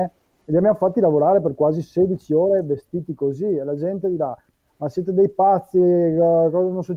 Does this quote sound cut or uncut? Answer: uncut